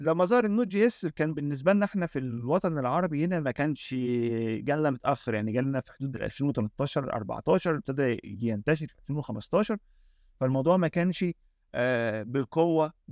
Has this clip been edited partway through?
no; 0 cuts

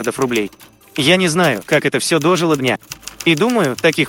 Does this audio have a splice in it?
yes; 1 cut; at 2.6 s

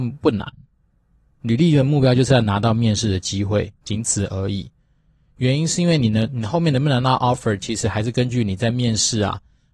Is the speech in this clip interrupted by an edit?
no; 0 cuts

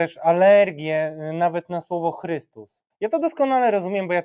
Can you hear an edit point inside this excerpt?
yes; 1 cut; at 2.9 s

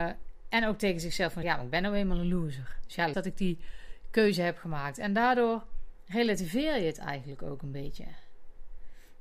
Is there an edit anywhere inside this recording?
yes; 2 cuts; at 1.4 s, 3.1 s

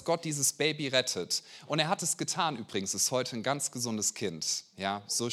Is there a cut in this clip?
no; 0 cuts

